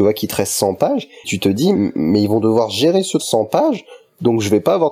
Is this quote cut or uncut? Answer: cut